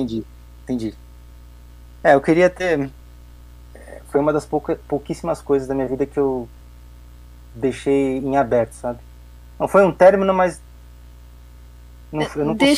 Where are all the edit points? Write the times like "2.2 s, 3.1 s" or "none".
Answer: none